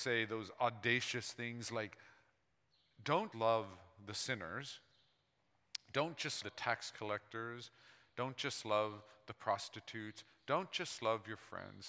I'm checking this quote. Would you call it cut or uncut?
cut